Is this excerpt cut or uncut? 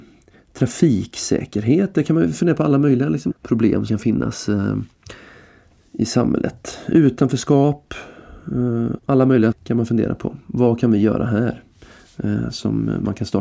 cut